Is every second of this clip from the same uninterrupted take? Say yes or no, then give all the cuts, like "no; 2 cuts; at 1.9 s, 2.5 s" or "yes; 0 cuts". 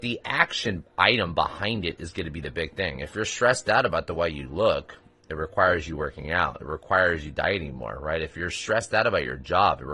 yes; 0 cuts